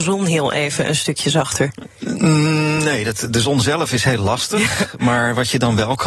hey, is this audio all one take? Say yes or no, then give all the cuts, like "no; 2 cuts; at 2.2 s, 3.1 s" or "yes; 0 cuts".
yes; 0 cuts